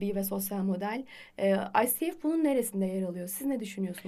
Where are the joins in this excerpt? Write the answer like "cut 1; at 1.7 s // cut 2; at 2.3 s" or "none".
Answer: none